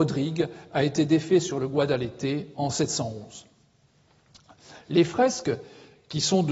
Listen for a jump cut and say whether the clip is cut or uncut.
uncut